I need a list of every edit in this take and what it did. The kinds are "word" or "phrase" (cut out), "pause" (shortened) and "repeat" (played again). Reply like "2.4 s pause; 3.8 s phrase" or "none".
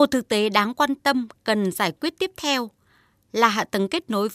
none